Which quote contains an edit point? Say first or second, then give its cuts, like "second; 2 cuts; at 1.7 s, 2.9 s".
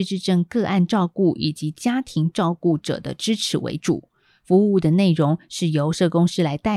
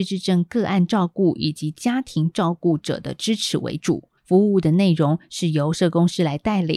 second; 1 cut; at 4.2 s